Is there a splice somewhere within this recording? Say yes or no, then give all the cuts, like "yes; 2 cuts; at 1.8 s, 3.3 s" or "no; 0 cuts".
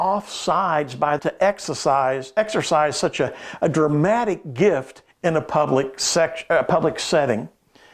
yes; 2 cuts; at 1.2 s, 5.1 s